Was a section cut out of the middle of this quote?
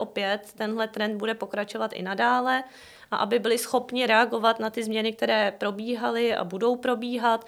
no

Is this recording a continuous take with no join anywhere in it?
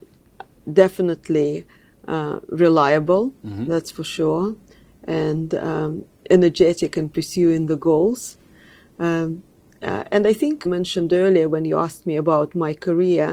no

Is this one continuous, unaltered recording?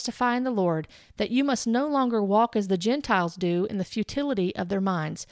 yes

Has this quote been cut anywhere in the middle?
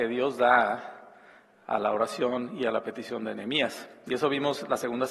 no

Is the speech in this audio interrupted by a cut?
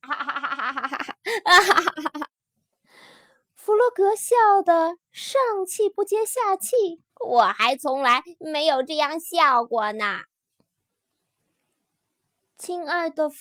yes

